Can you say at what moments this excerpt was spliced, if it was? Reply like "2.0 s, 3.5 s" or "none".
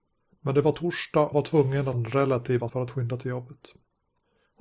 1.3 s, 1.9 s, 2.7 s